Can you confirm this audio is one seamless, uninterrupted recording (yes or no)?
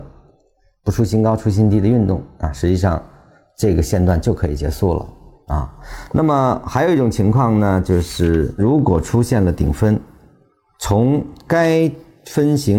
yes